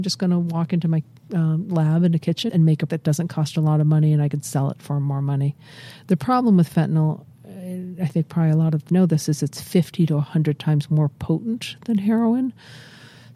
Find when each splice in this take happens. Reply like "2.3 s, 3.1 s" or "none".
2.5 s, 2.9 s, 8.9 s